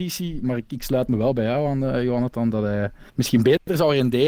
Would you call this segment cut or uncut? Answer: cut